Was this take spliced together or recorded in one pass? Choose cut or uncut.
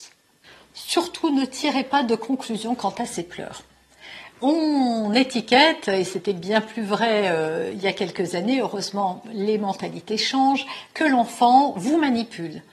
uncut